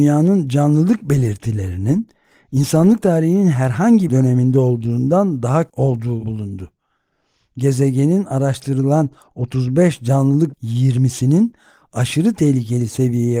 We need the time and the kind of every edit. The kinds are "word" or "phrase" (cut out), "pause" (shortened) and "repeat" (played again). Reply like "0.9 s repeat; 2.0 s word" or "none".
4.1 s word; 5.7 s word; 6.2 s word; 10.5 s word